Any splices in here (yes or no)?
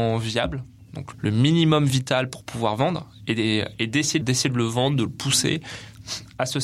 yes